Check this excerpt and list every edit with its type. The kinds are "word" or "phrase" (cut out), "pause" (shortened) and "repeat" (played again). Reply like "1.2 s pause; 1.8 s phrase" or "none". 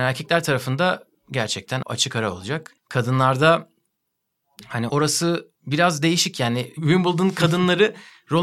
1.1 s word; 1.8 s word; 2.8 s pause; 4.9 s word; 5.6 s pause